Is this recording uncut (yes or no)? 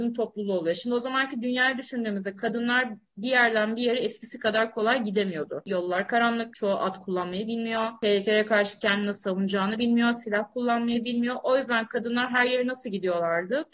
yes